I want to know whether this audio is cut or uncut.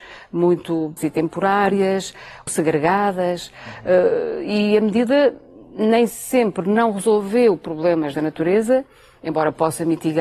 cut